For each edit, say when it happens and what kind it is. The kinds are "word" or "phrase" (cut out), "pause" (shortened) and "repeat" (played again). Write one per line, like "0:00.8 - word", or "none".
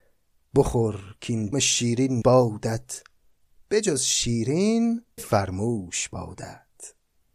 0:01.5 - word
0:02.2 - word
0:05.2 - word